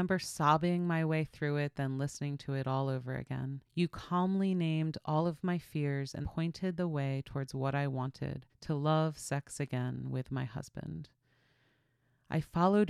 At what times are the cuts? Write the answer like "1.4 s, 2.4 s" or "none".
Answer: 3.6 s, 6.2 s, 8.5 s